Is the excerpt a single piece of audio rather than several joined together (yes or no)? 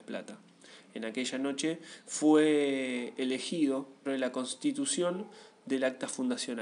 no